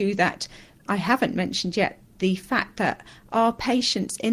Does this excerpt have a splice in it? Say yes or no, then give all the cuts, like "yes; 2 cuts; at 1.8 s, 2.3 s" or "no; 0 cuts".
no; 0 cuts